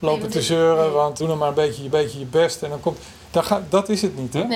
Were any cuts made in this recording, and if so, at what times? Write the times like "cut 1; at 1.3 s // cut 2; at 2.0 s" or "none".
cut 1; at 1.2 s // cut 2; at 1.9 s